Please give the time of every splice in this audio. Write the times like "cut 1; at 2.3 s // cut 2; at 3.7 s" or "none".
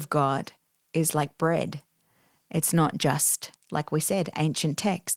none